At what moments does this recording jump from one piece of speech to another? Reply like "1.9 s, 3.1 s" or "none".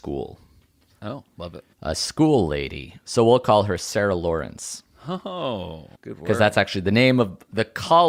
1.7 s, 5.9 s